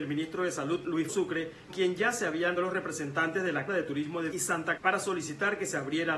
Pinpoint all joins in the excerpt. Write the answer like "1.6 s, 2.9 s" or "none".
1.1 s, 1.7 s, 2.6 s, 3.7 s, 4.3 s, 4.8 s